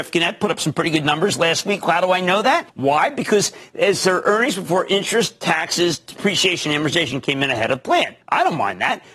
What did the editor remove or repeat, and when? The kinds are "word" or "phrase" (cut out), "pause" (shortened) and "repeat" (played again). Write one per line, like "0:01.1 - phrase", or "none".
0:02.7 - pause
0:08.2 - pause